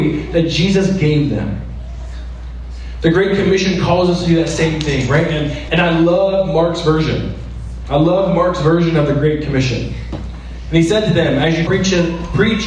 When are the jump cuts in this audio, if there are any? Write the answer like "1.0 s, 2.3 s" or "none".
5.7 s, 11.7 s